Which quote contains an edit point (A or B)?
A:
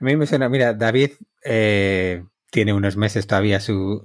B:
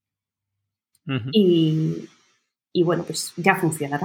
A